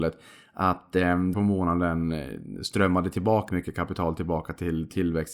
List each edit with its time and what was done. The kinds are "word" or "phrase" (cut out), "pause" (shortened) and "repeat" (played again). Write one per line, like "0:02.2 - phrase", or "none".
0:01.3 - phrase
0:03.5 - word